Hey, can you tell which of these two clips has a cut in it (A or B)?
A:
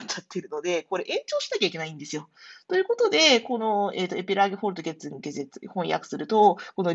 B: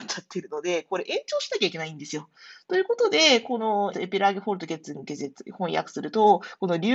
B